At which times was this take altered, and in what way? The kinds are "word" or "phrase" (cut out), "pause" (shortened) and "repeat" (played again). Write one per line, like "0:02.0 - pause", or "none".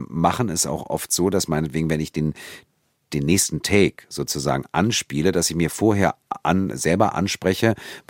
none